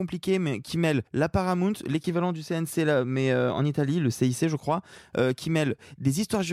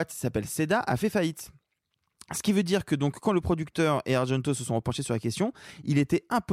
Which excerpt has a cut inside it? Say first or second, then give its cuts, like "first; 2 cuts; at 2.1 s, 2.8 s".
first; 1 cut; at 1.1 s